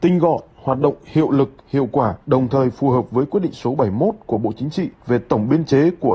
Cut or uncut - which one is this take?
cut